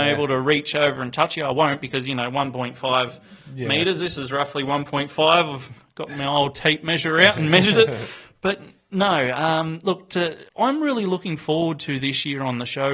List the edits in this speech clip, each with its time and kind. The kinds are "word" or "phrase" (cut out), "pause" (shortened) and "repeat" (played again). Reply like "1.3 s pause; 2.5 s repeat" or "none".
10.5 s pause